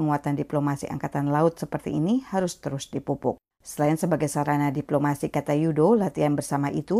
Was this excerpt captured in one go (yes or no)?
yes